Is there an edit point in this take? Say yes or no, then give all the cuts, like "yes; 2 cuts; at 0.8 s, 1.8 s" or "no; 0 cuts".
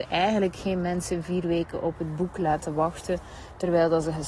no; 0 cuts